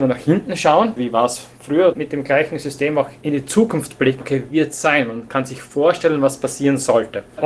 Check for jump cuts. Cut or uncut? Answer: cut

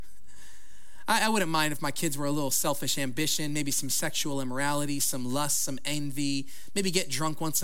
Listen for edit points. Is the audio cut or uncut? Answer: uncut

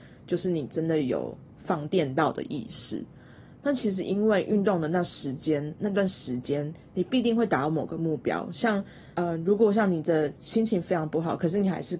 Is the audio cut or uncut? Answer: cut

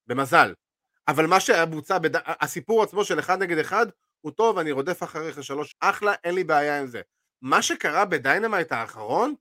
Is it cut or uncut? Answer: cut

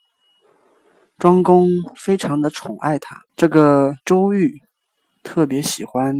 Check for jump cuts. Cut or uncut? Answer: cut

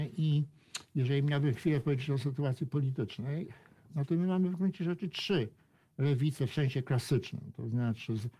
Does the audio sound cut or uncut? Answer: uncut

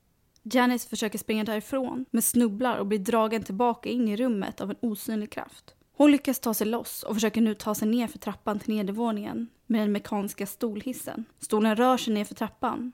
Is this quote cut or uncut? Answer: cut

